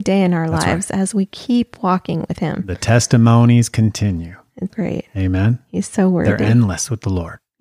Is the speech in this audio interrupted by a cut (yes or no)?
yes